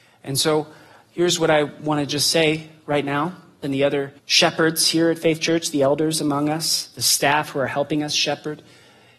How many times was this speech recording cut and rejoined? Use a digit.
2